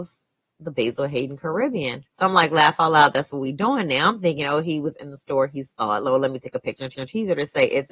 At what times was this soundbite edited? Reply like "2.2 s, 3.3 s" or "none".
2.1 s, 6.9 s